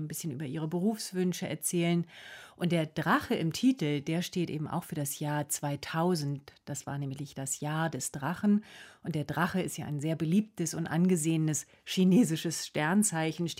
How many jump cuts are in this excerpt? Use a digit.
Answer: 0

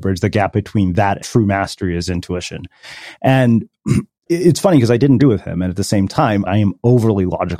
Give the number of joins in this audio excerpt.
4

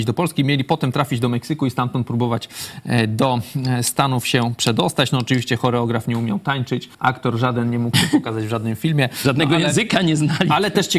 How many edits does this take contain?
1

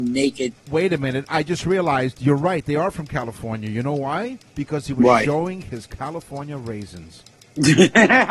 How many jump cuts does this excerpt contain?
0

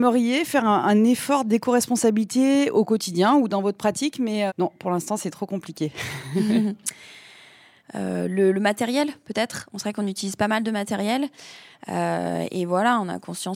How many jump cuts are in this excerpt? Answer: 1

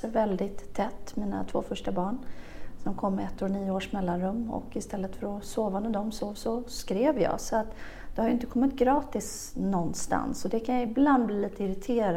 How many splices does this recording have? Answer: 0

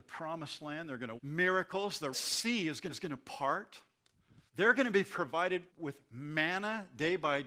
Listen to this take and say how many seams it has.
5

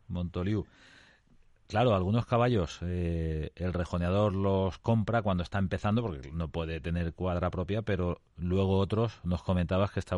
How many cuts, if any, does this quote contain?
1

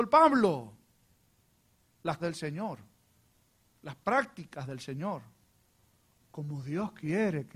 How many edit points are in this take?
2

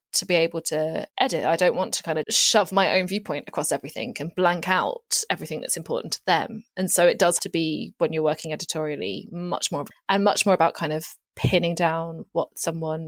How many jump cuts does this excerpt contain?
4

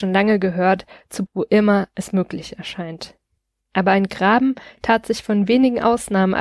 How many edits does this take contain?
2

